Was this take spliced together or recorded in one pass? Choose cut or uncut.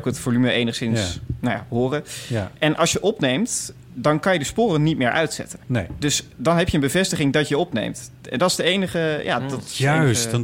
cut